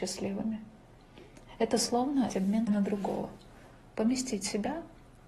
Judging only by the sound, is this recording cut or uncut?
cut